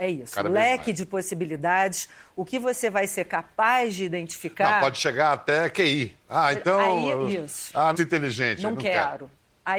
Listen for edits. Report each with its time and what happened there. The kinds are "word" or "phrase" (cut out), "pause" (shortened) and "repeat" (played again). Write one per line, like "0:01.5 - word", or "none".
0:06.2 - pause
0:07.9 - phrase